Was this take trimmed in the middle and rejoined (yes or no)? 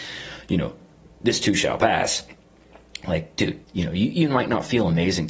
yes